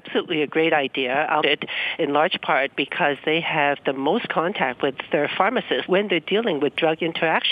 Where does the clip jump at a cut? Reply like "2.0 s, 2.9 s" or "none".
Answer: 1.4 s, 5.9 s